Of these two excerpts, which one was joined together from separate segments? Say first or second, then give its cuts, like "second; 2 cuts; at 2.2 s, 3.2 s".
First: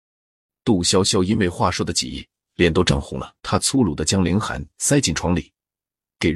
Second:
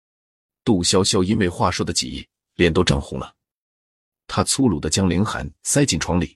first; 1 cut; at 3.4 s